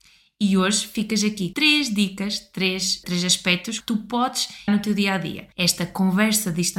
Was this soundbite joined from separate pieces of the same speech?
yes; 5 cuts; at 1.5 s, 3.0 s, 3.8 s, 4.7 s, 5.5 s

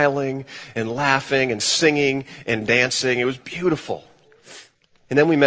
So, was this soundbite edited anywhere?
no; 0 cuts

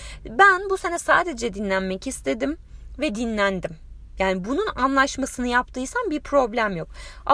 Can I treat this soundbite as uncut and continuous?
yes; 0 cuts

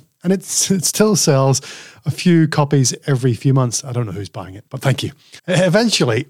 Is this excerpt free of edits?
no; 2 cuts; at 4.7 s, 5.4 s

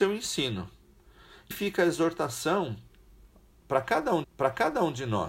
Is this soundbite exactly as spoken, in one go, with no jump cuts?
no; 2 cuts; at 1.5 s, 4.2 s

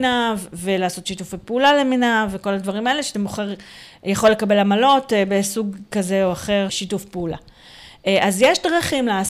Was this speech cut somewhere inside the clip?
yes; 2 cuts; at 3.1 s, 6.7 s

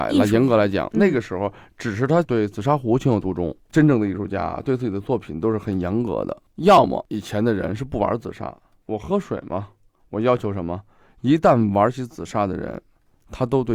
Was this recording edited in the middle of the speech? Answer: no; 0 cuts

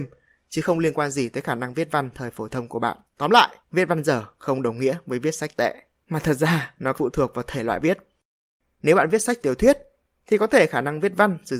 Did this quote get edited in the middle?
yes; 6 cuts; at 3.1 s, 3.6 s, 5.9 s, 6.9 s, 7.8 s, 9.4 s

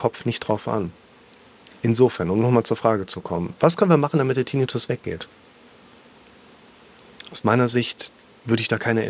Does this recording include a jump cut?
no; 0 cuts

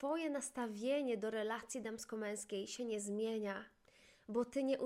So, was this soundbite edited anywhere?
no; 0 cuts

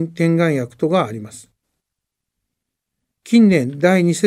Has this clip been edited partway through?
no; 0 cuts

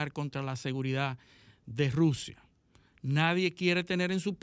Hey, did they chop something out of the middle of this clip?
no; 0 cuts

